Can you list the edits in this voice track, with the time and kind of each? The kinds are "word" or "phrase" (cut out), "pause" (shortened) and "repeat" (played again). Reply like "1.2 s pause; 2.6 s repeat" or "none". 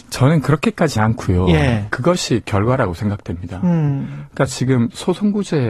1.0 s word; 2.4 s word; 4.5 s word